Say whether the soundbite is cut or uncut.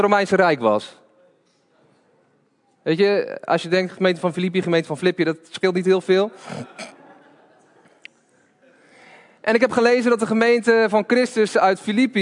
uncut